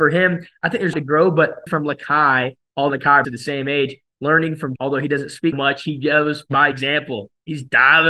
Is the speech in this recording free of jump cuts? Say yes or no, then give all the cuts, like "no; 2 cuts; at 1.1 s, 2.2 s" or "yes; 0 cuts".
no; 6 cuts; at 0.9 s, 1.7 s, 2.9 s, 3.2 s, 4.8 s, 5.5 s